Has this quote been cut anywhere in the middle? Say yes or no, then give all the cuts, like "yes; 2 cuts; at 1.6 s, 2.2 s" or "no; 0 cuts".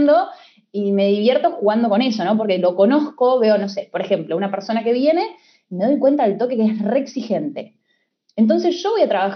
no; 0 cuts